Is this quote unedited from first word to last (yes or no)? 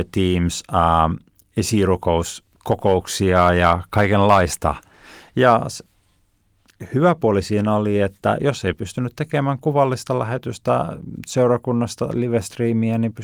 yes